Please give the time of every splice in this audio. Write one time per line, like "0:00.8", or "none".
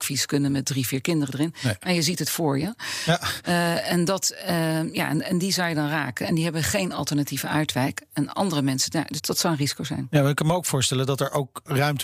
0:09.2